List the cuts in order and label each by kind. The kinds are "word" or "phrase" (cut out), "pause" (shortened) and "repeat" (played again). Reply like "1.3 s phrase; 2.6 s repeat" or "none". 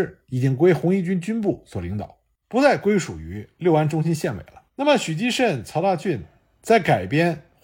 4.7 s pause